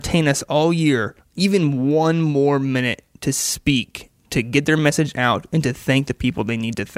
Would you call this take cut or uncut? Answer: cut